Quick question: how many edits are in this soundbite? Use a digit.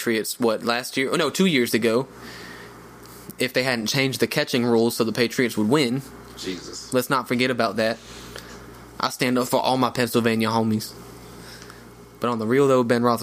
0